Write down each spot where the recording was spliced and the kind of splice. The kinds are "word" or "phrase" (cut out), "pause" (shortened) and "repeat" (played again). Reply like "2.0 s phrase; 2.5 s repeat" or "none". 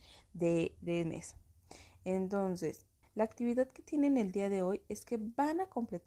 1.0 s word; 3.0 s pause